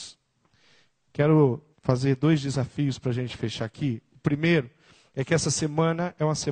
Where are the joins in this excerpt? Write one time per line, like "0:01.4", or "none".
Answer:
0:01.7